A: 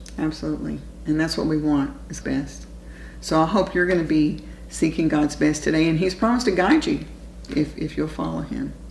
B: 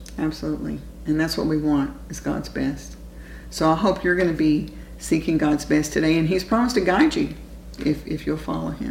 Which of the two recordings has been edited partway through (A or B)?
A